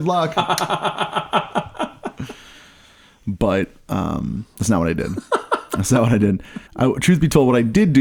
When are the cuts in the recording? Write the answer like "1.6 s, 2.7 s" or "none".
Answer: 6.7 s